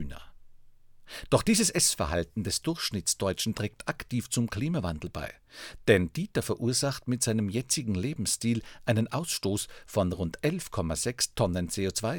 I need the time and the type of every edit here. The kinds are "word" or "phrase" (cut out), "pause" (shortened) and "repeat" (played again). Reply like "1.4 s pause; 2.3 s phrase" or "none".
none